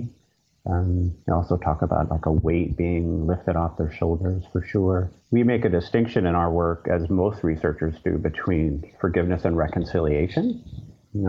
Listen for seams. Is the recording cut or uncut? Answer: cut